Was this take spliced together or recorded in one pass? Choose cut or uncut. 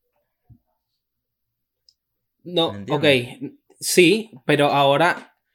uncut